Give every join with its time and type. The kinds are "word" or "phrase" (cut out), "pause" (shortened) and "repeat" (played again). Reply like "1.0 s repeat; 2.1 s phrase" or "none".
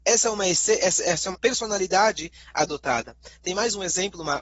1.3 s word